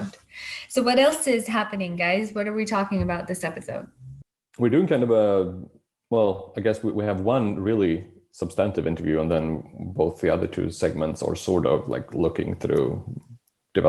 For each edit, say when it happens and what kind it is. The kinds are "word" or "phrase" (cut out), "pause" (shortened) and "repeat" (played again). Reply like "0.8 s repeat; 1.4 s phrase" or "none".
none